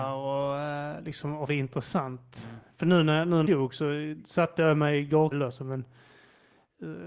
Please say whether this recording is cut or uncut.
cut